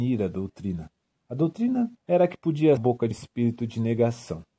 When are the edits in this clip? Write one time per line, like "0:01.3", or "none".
0:01.1
0:02.0
0:02.8
0:03.1